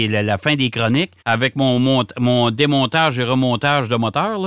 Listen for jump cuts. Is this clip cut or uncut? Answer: cut